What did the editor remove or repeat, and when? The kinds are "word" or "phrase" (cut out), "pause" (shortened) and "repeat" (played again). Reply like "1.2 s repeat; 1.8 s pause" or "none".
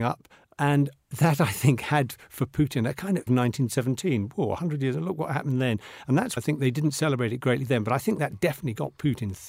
3.3 s phrase; 6.4 s word